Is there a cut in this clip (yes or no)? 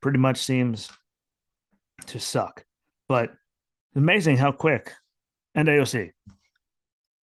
no